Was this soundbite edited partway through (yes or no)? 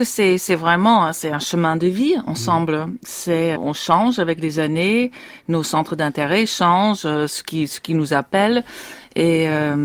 yes